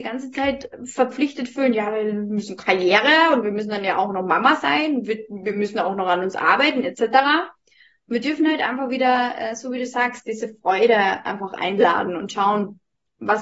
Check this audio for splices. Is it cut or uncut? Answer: uncut